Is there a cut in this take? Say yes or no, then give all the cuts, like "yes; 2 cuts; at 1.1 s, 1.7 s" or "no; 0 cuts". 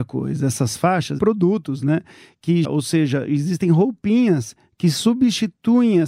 yes; 2 cuts; at 1.2 s, 2.6 s